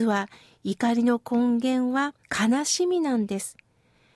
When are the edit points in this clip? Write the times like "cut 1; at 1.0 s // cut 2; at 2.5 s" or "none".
cut 1; at 2.2 s